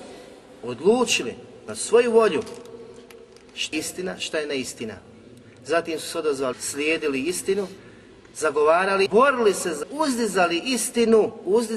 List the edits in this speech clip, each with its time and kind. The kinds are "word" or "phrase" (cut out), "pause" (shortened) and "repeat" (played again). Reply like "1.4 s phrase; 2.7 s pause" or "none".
3.7 s word; 6.5 s word; 9.1 s word; 9.8 s word